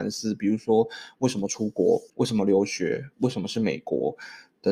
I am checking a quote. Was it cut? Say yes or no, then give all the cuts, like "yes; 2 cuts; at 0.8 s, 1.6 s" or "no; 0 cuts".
yes; 1 cut; at 2.1 s